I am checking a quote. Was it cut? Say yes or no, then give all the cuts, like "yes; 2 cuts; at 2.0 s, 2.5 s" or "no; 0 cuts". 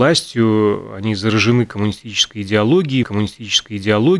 yes; 1 cut; at 3.0 s